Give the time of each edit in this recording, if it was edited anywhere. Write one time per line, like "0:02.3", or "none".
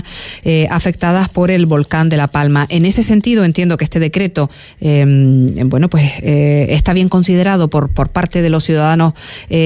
none